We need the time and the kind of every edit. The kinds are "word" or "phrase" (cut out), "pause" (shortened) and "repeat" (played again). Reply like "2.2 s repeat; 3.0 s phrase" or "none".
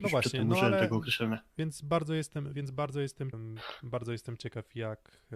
3.3 s word